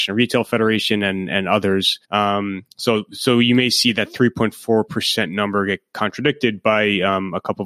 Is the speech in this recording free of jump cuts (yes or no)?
no